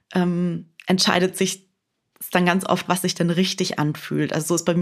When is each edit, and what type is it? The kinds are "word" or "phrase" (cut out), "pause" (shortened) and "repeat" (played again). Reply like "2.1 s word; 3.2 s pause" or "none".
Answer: 2.9 s word